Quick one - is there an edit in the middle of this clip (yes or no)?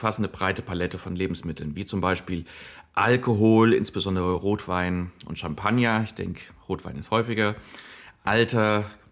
no